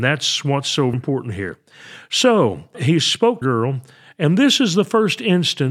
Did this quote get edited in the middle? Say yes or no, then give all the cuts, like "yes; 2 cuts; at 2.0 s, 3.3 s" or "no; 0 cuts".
yes; 3 cuts; at 0.9 s, 2.7 s, 3.4 s